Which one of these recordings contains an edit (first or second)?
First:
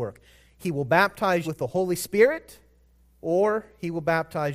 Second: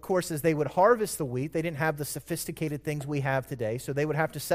first